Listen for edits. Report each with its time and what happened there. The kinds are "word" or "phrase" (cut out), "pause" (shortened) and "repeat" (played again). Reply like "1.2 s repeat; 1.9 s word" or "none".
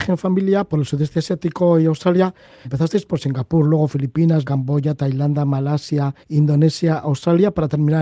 2.6 s word; 4.4 s word; 6.2 s pause